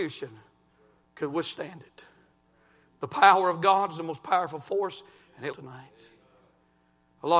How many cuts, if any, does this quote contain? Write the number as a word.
one